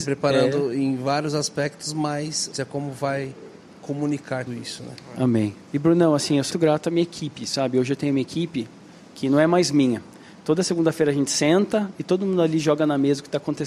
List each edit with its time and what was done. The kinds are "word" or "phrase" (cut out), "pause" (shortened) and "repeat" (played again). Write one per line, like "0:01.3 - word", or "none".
0:02.5 - phrase
0:04.5 - word
0:06.5 - word